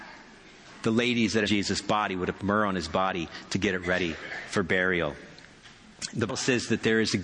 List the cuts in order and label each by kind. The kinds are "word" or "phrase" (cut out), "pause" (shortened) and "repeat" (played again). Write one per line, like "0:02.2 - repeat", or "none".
0:01.4 - word
0:02.4 - word
0:06.3 - word